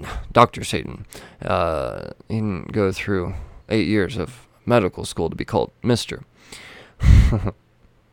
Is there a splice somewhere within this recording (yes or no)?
yes